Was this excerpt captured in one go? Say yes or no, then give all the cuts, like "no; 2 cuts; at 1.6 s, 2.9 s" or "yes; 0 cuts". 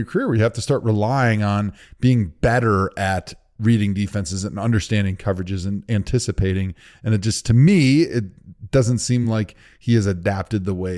yes; 0 cuts